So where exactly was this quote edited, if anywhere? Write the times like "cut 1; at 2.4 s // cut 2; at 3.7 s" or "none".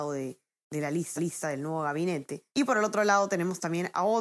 cut 1; at 1.2 s // cut 2; at 2.5 s